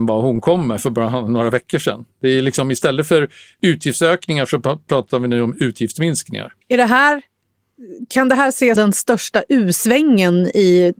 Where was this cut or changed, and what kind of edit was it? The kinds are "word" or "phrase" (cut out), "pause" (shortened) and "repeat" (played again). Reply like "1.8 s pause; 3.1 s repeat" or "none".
6.6 s pause; 8.8 s word